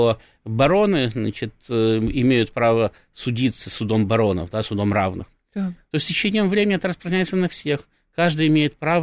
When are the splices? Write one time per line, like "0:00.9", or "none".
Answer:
none

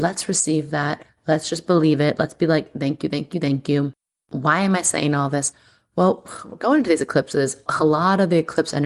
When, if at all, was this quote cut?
none

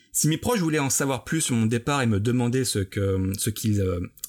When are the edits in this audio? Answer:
none

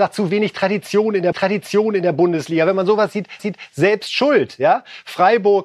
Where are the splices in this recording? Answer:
0:01.3
0:03.4

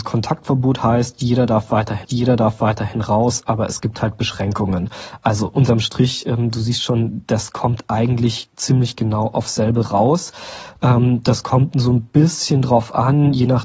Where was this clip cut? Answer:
0:02.0

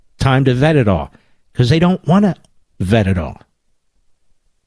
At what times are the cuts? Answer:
none

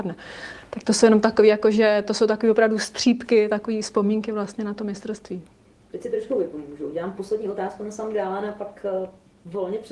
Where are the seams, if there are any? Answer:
none

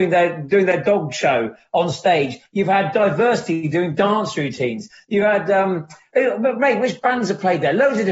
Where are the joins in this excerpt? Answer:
none

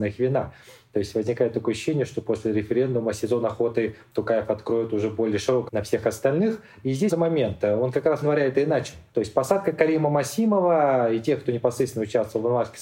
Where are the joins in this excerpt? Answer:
0:05.7
0:07.1
0:08.2
0:09.1

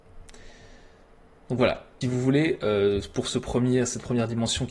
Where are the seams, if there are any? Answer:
0:02.0

